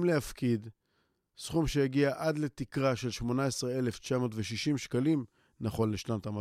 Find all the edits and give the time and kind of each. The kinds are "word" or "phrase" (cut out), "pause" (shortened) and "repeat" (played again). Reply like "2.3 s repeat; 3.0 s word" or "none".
none